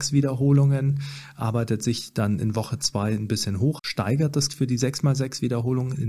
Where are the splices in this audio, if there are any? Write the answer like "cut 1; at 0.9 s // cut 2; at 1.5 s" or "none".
cut 1; at 3.8 s // cut 2; at 4.5 s